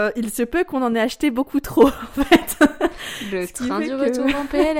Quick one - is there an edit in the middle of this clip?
no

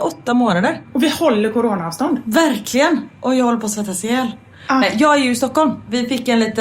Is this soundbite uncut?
yes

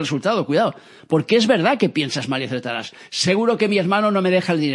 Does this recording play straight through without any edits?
yes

